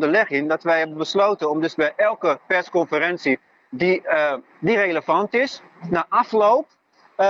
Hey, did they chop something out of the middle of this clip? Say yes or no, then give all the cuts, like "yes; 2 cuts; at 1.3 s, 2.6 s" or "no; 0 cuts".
no; 0 cuts